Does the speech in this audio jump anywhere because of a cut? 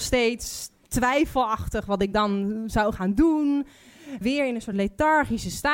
no; 0 cuts

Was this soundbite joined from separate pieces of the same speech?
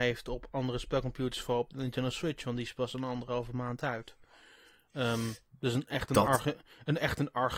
no; 0 cuts

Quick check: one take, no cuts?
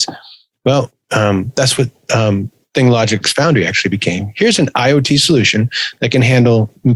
yes; 0 cuts

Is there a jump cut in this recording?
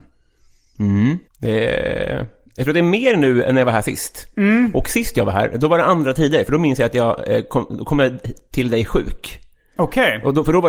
yes; 1 cut; at 1.3 s

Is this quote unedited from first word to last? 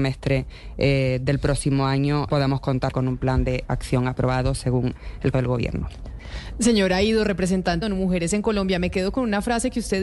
no; 4 cuts; at 2.3 s, 2.9 s, 5.3 s, 7.8 s

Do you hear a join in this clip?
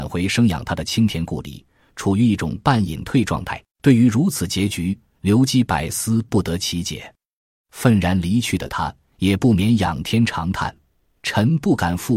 yes; 1 cut; at 3.7 s

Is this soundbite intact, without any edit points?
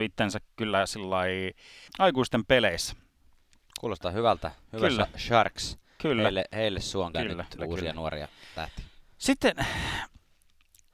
no; 3 cuts; at 1.9 s, 7.1 s, 7.6 s

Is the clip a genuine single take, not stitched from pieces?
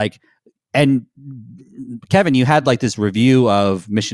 yes; 0 cuts

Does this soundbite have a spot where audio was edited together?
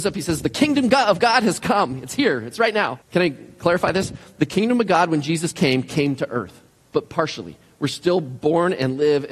yes; 2 cuts; at 3.0 s, 6.7 s

